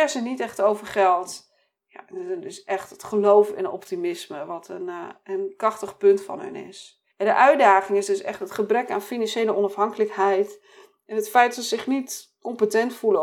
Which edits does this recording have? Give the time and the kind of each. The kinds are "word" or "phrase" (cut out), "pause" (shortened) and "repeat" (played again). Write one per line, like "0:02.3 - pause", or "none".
0:07.1 - pause